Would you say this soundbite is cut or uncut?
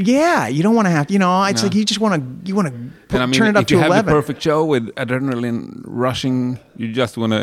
uncut